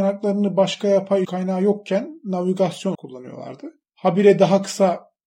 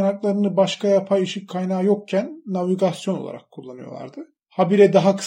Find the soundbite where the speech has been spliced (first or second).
first